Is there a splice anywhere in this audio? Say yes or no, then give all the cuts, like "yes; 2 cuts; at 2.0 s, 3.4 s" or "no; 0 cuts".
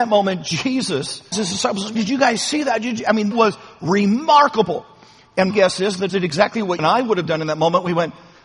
yes; 6 cuts; at 1.3 s, 1.9 s, 3.3 s, 5.5 s, 6.1 s, 6.8 s